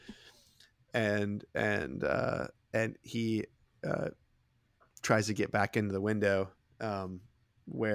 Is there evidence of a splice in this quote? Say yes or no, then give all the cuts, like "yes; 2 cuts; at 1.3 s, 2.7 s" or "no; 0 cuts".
no; 0 cuts